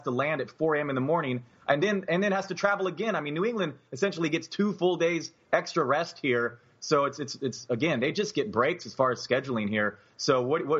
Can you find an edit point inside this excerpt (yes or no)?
no